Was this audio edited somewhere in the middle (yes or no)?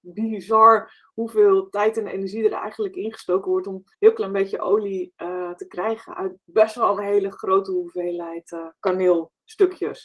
yes